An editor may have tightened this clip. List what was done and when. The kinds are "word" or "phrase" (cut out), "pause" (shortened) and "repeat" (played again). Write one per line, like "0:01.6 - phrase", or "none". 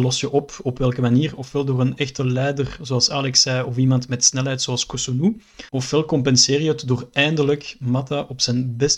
0:05.7 - pause